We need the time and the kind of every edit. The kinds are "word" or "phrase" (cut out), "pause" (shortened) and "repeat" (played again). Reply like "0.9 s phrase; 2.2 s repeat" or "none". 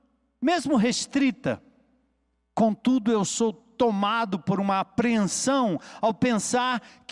none

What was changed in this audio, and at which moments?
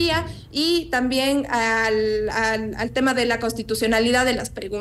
none

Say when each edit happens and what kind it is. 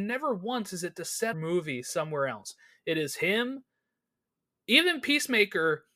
1.3 s phrase

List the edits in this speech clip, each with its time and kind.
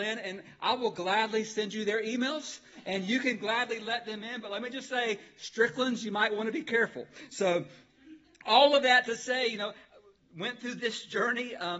none

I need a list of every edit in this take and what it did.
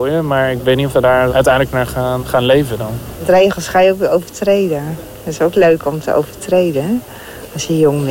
0.9 s word; 1.3 s word; 2.2 s word

